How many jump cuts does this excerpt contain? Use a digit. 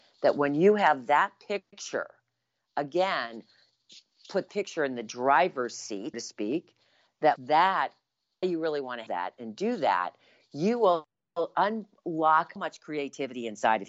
6